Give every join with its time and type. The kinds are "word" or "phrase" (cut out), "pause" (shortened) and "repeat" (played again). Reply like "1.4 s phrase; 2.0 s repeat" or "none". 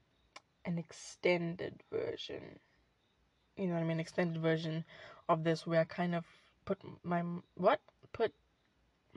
none